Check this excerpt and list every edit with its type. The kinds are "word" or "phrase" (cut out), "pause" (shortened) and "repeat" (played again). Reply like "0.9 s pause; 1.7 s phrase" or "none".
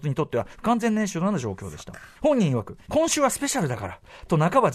2.1 s pause; 2.8 s pause